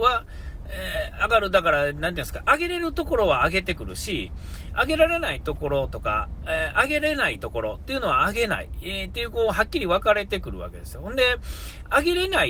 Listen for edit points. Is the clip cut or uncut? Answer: uncut